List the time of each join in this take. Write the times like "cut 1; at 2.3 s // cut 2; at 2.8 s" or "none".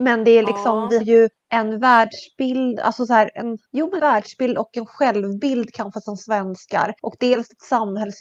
cut 1; at 1.0 s // cut 2; at 1.3 s // cut 3; at 3.7 s // cut 4; at 4.0 s // cut 5; at 7.0 s